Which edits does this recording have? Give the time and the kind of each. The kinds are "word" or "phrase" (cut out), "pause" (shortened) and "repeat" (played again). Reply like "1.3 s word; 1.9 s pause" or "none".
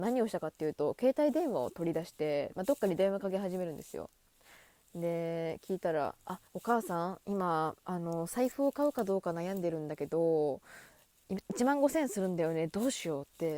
6.5 s pause